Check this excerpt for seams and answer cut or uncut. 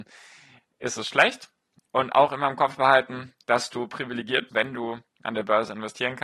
cut